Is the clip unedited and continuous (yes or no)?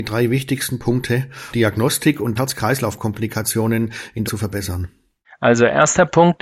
no